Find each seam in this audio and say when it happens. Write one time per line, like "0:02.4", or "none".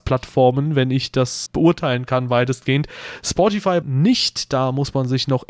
0:01.5
0:03.8